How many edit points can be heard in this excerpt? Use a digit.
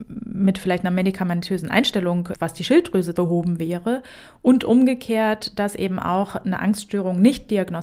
1